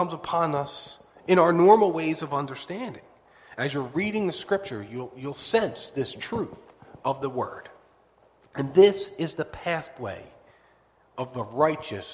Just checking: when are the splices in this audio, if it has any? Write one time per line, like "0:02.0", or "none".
none